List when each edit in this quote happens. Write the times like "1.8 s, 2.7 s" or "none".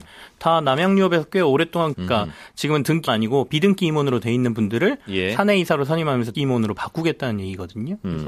1.9 s, 3.1 s, 6.3 s